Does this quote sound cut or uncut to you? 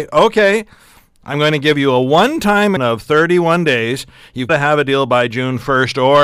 cut